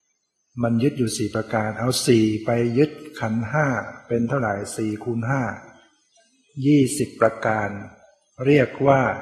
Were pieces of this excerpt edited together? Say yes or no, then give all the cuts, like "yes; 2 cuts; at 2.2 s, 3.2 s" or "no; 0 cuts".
no; 0 cuts